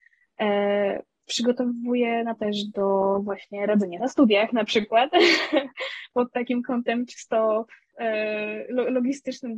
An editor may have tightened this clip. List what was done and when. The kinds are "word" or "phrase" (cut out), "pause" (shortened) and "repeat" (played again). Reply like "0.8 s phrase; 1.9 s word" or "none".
2.4 s word; 4.0 s word; 7.9 s word